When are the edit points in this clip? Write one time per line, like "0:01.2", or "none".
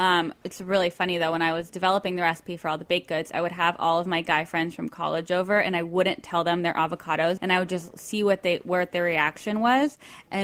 0:07.4